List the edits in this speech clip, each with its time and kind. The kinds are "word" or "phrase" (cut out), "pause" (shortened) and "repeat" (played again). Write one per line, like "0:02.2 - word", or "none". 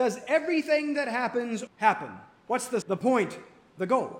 0:01.7 - word
0:02.8 - word